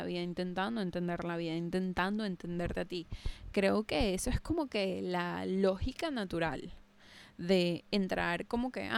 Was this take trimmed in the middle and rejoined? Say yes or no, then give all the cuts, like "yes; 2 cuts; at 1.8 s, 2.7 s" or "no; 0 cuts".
no; 0 cuts